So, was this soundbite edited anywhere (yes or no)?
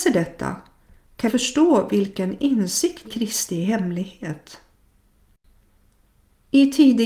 yes